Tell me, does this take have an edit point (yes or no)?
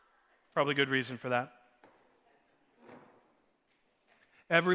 no